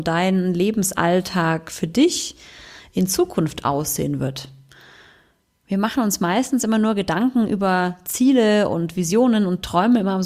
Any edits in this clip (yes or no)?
no